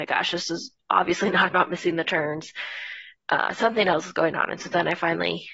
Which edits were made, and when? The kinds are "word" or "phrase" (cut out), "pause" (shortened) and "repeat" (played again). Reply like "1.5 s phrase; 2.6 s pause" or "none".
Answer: none